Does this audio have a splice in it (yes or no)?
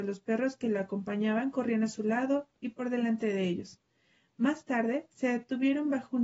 no